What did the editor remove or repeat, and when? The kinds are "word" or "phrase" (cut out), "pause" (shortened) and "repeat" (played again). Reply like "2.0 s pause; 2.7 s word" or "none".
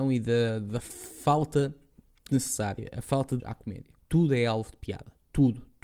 2.3 s word; 3.4 s word; 4.0 s pause